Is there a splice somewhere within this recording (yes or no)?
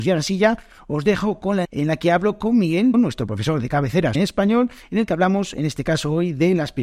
yes